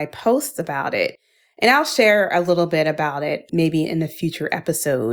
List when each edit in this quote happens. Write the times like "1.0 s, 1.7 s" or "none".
none